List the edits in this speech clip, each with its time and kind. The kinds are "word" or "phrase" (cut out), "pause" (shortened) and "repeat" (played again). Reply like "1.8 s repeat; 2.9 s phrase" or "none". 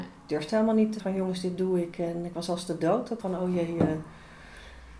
1.0 s word; 3.2 s phrase